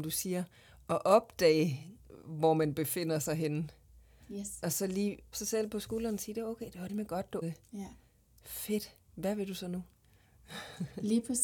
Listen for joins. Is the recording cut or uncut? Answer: cut